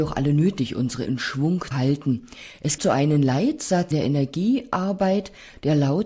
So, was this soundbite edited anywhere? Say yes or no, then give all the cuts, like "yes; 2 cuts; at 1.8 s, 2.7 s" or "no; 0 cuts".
yes; 4 cuts; at 1.0 s, 1.7 s, 2.8 s, 3.9 s